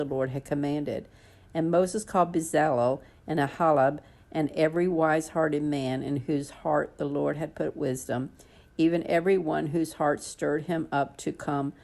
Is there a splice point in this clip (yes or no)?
no